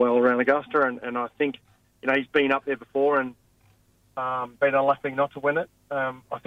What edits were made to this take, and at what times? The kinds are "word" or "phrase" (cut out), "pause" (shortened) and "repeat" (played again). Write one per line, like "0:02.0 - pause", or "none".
none